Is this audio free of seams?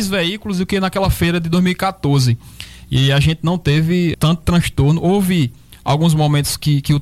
no; 1 cut; at 4.1 s

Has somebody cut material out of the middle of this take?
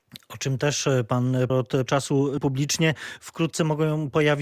yes; 3 cuts; at 1.5 s, 1.9 s, 2.4 s

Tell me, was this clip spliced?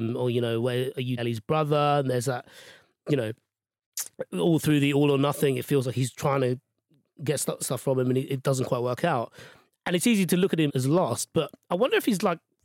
yes; 3 cuts; at 1.2 s, 7.6 s, 10.7 s

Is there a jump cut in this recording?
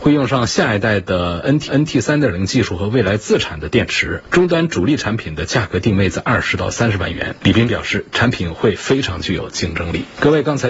yes; 1 cut; at 1.7 s

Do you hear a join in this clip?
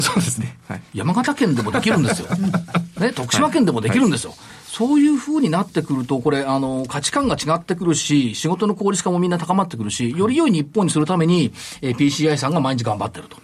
no; 0 cuts

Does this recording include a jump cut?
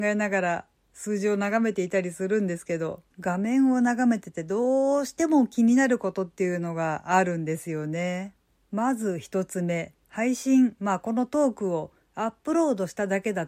yes; 3 cuts; at 3.1 s, 8.5 s, 10.0 s

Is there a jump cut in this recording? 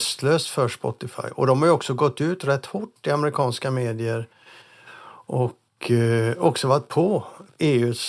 no; 0 cuts

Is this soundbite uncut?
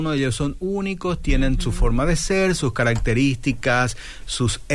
yes; 0 cuts

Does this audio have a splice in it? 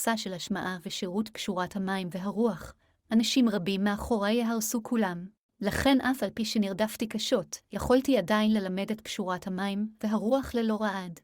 yes; 2 cuts; at 5.4 s, 7.6 s

